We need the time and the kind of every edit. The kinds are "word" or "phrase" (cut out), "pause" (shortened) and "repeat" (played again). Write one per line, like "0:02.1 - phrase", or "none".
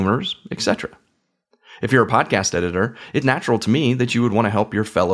0:03.2 - word